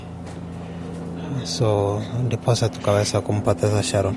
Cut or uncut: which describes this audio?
uncut